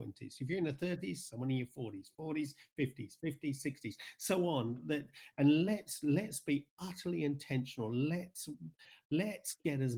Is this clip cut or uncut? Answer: uncut